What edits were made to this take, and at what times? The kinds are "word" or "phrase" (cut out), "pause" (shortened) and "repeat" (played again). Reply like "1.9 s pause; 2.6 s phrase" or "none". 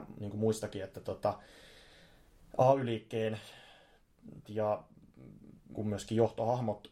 4.4 s word; 5.7 s word